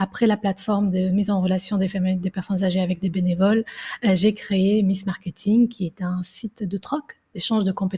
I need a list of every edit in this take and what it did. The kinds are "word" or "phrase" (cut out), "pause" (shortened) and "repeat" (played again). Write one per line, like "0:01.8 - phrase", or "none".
none